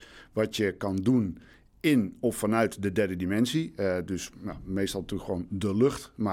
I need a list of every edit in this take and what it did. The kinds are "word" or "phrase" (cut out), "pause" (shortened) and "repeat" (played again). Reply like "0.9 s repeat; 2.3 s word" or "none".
none